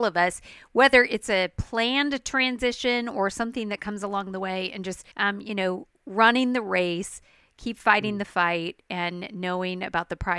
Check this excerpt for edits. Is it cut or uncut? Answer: cut